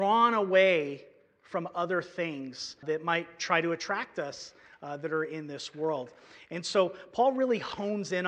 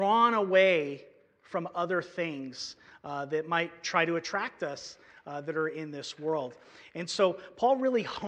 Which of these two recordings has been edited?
first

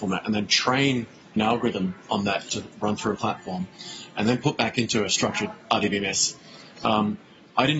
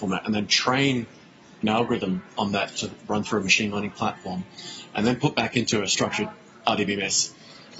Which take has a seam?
first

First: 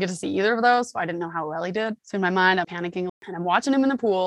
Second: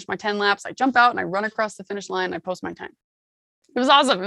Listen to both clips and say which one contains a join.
first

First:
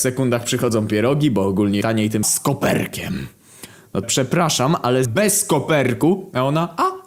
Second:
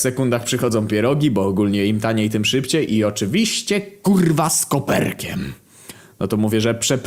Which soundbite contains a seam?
first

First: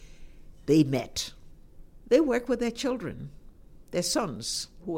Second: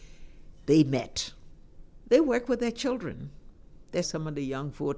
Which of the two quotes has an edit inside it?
second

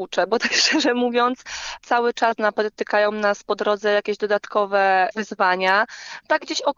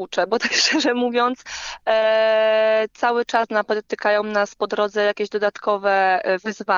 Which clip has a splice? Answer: first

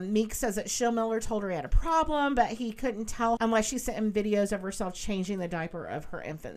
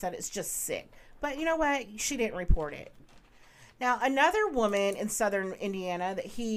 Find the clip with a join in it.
first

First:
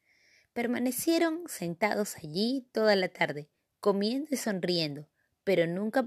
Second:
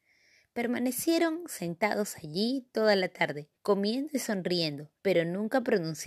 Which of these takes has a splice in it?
second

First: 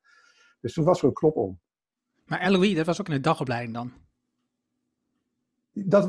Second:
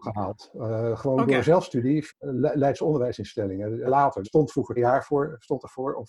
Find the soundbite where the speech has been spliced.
second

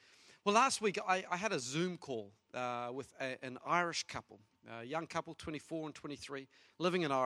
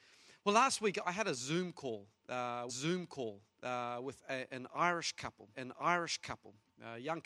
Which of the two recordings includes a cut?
second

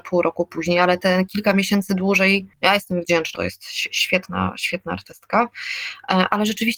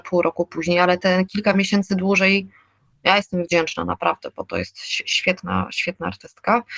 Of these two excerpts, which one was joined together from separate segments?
first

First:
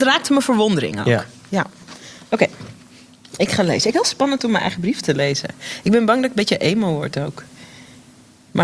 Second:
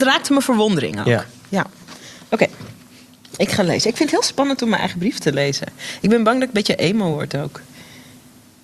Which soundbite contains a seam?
first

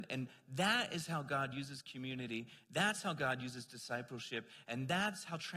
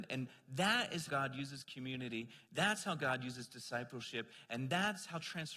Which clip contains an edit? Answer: second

